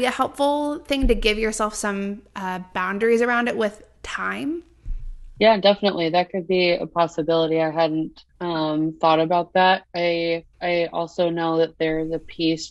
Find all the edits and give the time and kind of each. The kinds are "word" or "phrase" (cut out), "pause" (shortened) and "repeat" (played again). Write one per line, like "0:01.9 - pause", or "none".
0:08.3 - pause
0:10.5 - pause

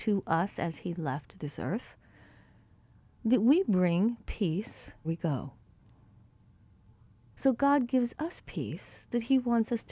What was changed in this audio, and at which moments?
0:05.0 - word

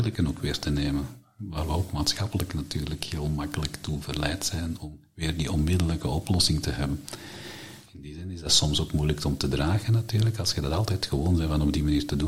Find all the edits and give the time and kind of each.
none

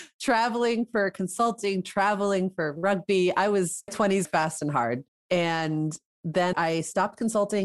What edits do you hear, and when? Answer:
0:03.9 - word
0:04.2 - word
0:05.1 - pause
0:06.5 - word

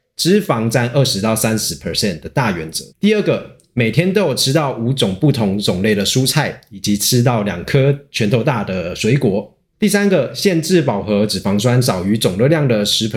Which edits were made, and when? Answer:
0:02.9 - pause

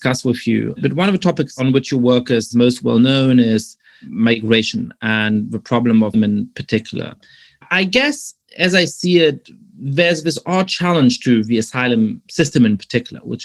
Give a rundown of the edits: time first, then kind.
0:06.1 - word
0:12.3 - pause

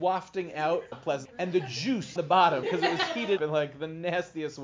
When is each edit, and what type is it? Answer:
0:00.9 - word
0:01.2 - word
0:02.2 - word
0:02.6 - word
0:03.4 - word

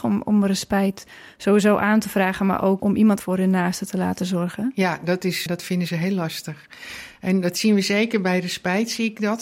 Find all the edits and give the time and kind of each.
0:02.8 - word
0:03.2 - word
0:05.5 - word

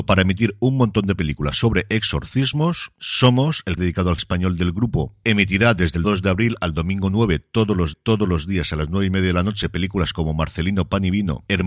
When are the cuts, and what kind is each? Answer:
0:03.8 - word
0:04.2 - word
0:06.0 - word
0:07.9 - repeat

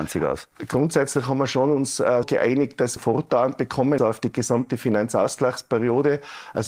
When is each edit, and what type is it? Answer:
0:02.2 - word
0:03.0 - phrase
0:04.0 - word

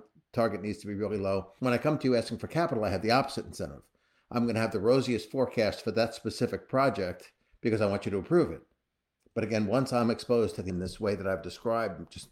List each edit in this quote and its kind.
0:10.7 - word

